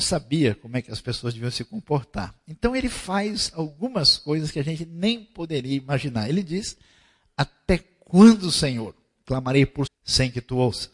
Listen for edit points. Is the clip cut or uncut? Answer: cut